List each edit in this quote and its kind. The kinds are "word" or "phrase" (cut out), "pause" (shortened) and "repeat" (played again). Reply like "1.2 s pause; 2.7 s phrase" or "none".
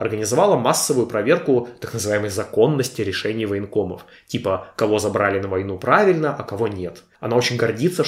none